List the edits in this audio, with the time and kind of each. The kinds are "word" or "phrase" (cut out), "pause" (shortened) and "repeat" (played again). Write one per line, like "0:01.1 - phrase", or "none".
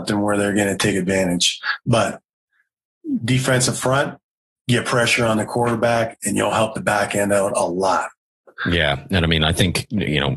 none